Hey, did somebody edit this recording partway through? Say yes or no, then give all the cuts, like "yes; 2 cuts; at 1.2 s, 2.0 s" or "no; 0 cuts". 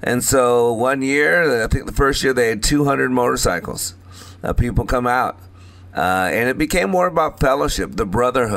no; 0 cuts